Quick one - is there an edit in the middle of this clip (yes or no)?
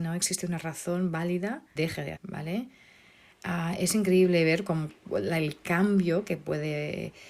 yes